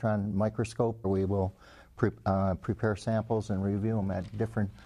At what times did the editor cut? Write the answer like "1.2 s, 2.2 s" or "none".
1.0 s